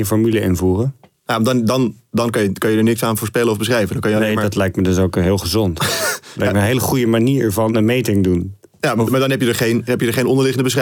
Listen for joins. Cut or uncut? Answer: uncut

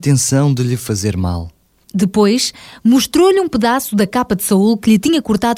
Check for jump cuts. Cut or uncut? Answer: uncut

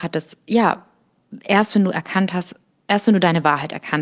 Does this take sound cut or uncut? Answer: uncut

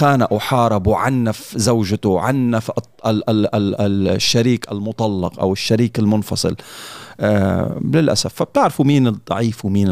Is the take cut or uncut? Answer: uncut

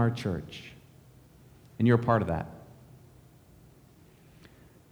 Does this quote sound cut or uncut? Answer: uncut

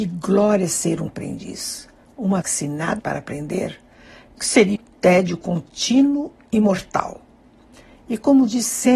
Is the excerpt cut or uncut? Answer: cut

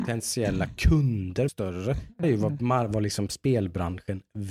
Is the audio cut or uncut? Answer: cut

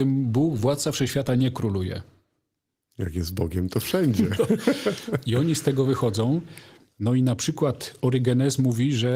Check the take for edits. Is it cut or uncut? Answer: uncut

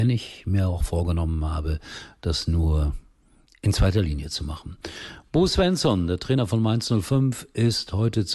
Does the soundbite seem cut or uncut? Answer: uncut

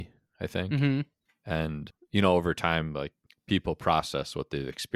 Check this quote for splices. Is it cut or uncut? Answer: uncut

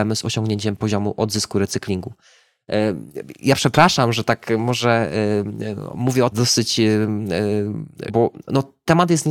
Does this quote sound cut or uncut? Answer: cut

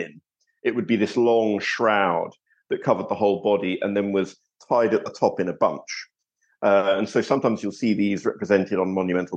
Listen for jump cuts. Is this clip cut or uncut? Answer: uncut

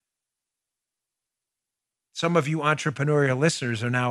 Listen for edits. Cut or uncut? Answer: uncut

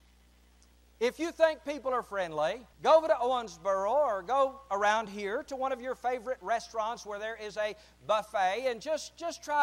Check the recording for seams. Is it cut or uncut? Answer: cut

